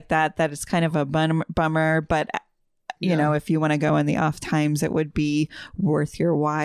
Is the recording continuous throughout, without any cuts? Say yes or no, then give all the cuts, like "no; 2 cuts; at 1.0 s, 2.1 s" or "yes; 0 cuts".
yes; 0 cuts